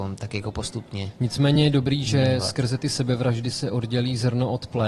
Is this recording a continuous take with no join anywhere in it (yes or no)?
yes